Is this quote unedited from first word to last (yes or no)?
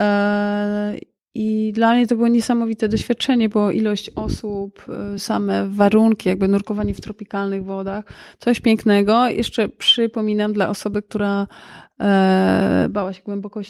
yes